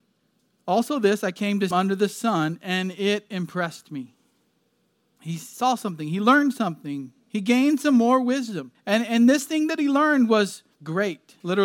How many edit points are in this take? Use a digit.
1